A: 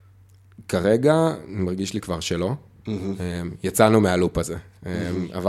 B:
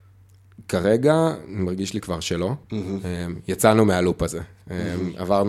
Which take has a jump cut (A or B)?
B